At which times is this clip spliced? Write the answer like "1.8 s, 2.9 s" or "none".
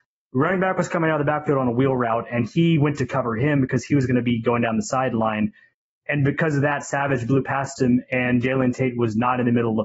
none